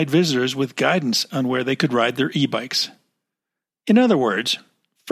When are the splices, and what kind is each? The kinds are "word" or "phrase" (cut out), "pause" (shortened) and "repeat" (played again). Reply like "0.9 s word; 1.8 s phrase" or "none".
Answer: none